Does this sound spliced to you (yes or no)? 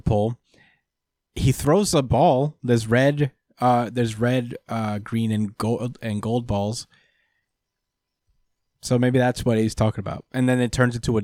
no